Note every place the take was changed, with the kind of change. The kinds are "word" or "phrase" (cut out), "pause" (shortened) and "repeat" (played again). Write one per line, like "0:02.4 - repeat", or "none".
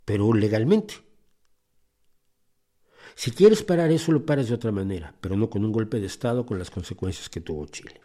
none